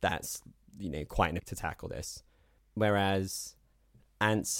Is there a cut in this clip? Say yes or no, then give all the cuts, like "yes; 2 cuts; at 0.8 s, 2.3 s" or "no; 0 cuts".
yes; 1 cut; at 1.4 s